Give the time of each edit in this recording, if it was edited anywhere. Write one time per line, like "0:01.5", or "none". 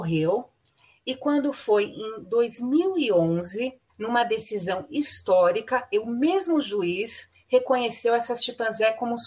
0:03.9